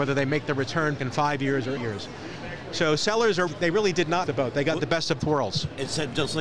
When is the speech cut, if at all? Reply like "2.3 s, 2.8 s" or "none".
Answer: 1.0 s, 1.8 s, 3.5 s, 4.3 s, 5.2 s